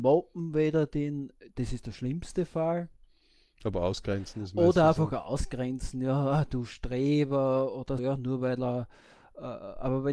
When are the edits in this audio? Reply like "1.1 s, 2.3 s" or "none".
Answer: 8.0 s